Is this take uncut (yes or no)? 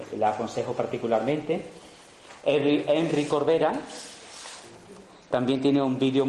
yes